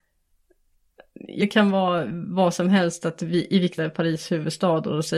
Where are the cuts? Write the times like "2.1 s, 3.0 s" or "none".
1.4 s, 3.8 s